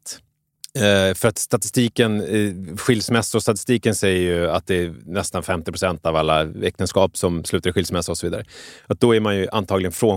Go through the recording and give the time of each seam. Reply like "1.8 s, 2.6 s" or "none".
none